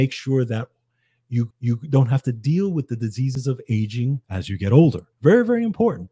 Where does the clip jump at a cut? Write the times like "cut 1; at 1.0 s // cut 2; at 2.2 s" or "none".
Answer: cut 1; at 1.5 s // cut 2; at 4.2 s // cut 3; at 5.1 s